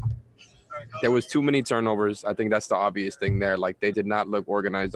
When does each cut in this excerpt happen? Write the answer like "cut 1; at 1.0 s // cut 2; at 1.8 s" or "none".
cut 1; at 3.9 s